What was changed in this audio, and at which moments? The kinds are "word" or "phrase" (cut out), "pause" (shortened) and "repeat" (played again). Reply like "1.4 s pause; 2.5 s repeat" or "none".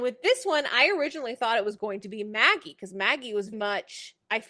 3.5 s word